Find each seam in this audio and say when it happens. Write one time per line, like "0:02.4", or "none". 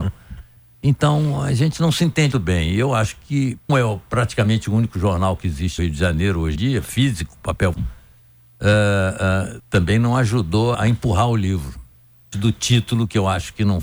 0:02.3
0:03.7
0:05.8
0:06.6
0:07.7
0:09.6
0:10.7
0:12.3